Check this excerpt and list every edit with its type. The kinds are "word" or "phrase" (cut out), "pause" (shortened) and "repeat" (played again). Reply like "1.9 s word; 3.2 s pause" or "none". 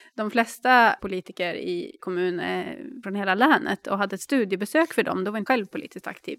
1.0 s word; 2.0 s word; 3.0 s word; 4.1 s word; 5.5 s word